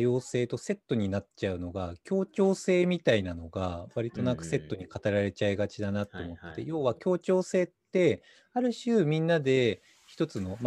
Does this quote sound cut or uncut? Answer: uncut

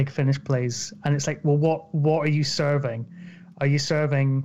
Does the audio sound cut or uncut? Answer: uncut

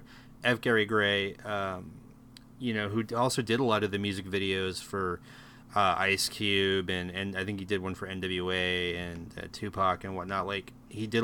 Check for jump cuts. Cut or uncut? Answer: uncut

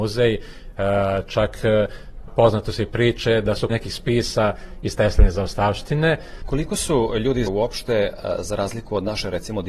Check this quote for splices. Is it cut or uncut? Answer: cut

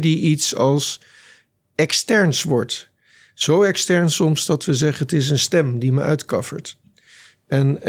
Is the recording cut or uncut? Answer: uncut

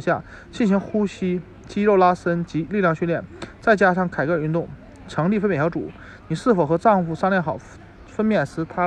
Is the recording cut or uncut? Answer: uncut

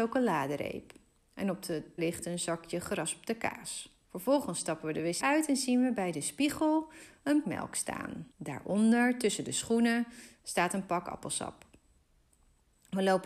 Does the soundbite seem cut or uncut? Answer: cut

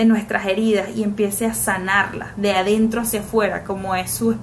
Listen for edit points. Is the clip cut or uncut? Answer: uncut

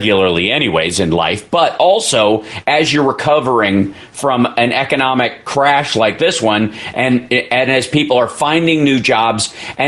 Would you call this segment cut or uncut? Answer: uncut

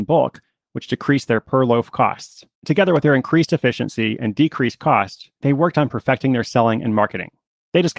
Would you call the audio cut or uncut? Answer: cut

